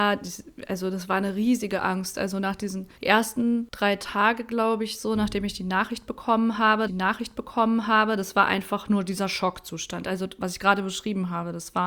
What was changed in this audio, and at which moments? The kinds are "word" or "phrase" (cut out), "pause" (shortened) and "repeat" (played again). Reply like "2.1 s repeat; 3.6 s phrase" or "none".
3.0 s pause; 6.9 s repeat